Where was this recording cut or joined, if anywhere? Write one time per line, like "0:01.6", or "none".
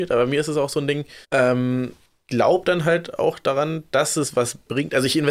0:01.2